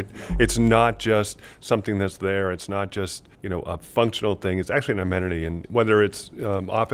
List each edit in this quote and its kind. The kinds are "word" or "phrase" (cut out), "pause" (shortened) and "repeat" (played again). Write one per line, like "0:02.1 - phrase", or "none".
0:03.3 - pause